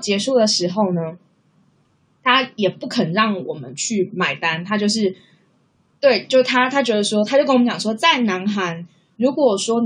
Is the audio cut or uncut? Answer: uncut